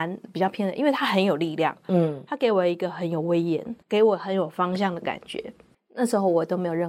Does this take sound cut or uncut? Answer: cut